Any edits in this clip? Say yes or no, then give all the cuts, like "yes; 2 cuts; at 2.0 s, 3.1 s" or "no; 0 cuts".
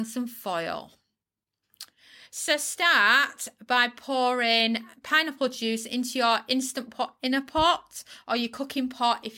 no; 0 cuts